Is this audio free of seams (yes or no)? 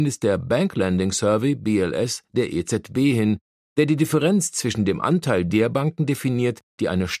yes